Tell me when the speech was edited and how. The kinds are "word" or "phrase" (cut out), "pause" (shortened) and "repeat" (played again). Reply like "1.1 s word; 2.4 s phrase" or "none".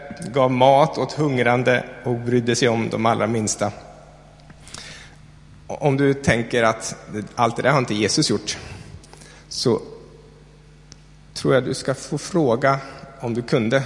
none